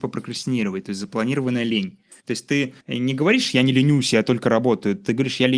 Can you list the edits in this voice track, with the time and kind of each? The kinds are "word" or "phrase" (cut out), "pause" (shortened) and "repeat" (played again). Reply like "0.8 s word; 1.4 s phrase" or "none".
2.2 s pause; 2.8 s pause